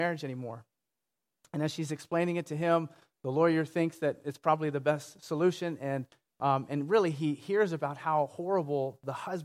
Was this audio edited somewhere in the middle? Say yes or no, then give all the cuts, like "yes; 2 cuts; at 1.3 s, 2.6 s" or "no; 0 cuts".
no; 0 cuts